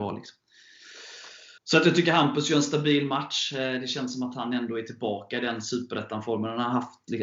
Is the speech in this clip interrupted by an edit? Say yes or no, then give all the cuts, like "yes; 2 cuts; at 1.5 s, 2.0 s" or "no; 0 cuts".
yes; 1 cut; at 1.6 s